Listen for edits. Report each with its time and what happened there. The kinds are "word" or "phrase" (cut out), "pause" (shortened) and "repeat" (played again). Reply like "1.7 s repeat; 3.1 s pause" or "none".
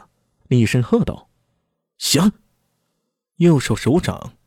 none